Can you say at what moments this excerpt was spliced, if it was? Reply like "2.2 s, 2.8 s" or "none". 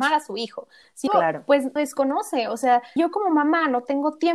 1.1 s, 1.8 s, 3.0 s